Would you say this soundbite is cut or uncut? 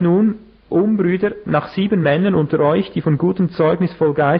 uncut